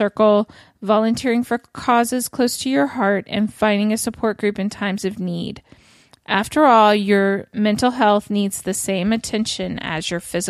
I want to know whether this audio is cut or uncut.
uncut